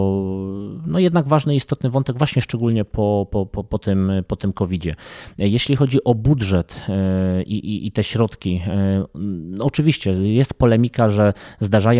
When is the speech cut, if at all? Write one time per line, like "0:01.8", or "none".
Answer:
none

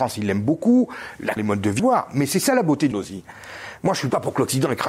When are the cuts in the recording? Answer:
0:01.4
0:01.8
0:02.9

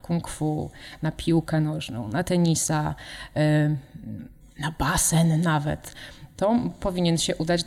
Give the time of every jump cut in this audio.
none

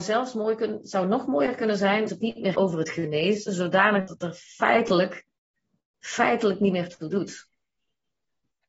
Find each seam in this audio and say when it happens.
0:02.1
0:02.5
0:04.1

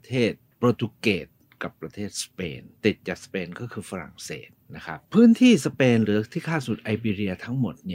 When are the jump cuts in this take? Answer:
0:02.8
0:05.0

